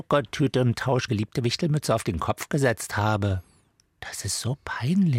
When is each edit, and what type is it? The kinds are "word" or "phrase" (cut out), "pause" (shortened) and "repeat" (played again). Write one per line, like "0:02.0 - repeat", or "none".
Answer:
0:01.1 - phrase